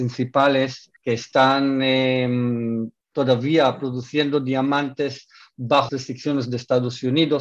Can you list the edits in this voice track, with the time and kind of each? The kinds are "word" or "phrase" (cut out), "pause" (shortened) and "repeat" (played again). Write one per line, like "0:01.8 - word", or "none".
0:01.0 - pause
0:03.0 - pause
0:05.9 - word